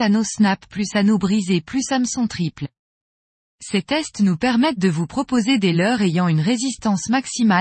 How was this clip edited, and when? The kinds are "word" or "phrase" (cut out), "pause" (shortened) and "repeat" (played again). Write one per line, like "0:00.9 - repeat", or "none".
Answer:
none